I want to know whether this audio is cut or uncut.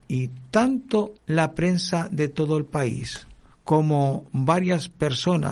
cut